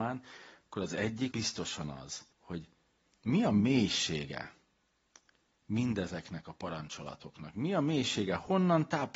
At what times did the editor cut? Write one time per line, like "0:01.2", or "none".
0:01.3
0:02.3